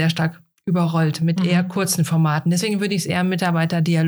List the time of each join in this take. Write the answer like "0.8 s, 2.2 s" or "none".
none